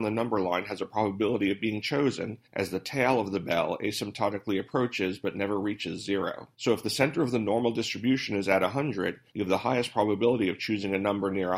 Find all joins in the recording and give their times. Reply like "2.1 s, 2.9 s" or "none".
2.4 s, 6.5 s, 9.3 s